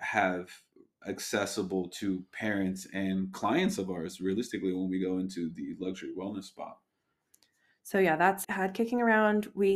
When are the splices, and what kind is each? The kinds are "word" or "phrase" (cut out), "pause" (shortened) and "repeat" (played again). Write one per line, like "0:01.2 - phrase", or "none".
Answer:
0:08.4 - phrase